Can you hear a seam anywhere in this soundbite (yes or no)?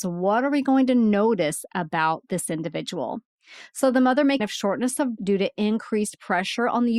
yes